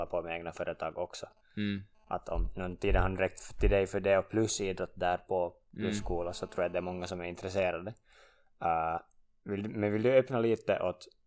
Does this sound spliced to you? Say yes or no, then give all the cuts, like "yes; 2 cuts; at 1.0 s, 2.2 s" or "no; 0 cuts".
no; 0 cuts